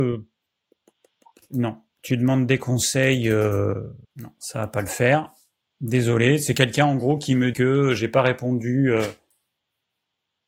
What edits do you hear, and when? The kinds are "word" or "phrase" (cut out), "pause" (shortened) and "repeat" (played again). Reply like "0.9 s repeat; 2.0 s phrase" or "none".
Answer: 4.0 s pause; 7.5 s word